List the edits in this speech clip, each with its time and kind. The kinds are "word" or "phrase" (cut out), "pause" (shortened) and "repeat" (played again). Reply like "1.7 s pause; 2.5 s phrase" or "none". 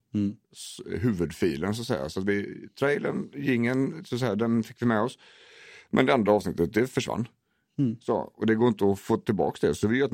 none